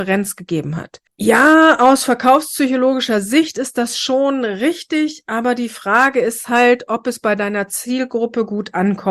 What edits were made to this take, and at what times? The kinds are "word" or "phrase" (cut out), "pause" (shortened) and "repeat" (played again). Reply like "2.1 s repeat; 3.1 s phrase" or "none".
1.1 s pause